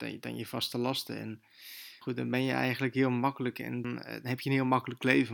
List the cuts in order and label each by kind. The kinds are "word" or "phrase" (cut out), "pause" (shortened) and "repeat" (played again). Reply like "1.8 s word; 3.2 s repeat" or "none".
2.0 s word; 3.8 s word